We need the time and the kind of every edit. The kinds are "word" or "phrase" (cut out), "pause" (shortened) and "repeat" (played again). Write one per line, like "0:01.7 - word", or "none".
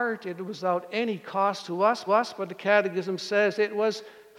0:02.1 - repeat